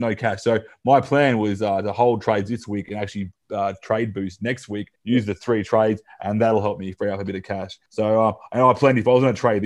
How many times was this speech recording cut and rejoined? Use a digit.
2